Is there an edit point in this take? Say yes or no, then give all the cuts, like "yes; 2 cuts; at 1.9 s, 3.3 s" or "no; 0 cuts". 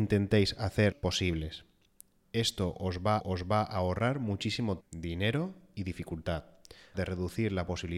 yes; 4 cuts; at 0.9 s, 3.2 s, 4.8 s, 6.9 s